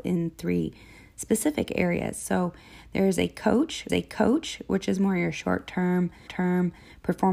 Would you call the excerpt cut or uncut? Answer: cut